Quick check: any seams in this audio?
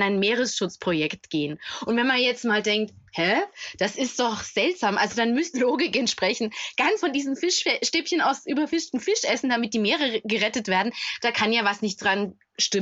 yes; 2 cuts; at 5.5 s, 7.0 s

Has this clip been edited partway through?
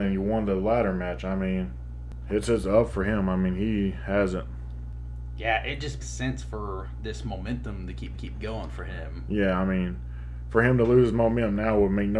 yes; 2 cuts; at 6.0 s, 8.1 s

